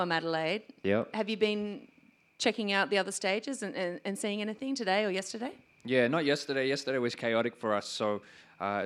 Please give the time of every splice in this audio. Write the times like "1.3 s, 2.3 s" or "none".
none